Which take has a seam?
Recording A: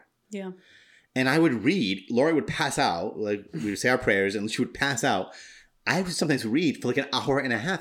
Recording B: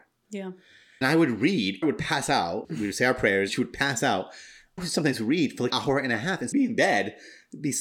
B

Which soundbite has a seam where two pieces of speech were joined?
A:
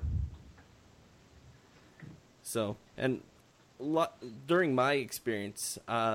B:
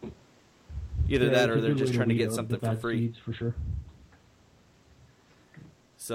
A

